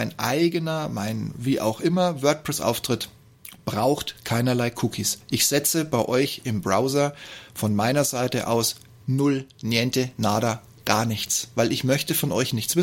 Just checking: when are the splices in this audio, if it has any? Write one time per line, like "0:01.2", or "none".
none